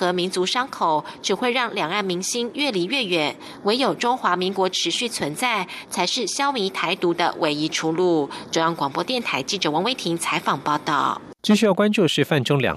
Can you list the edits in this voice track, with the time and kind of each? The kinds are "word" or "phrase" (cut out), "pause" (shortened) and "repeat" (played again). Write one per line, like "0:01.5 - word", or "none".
0:11.4 - pause